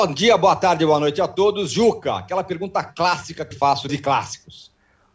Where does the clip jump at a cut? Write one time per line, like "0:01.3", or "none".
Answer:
0:03.5
0:03.9